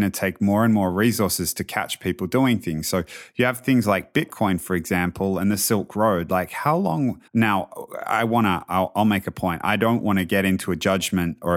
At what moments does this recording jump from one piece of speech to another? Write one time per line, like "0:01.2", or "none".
0:07.3